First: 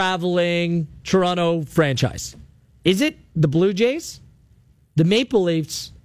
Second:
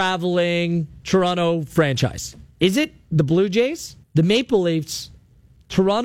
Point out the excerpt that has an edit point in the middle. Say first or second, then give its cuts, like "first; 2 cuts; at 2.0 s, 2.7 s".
second; 2 cuts; at 2.5 s, 4.0 s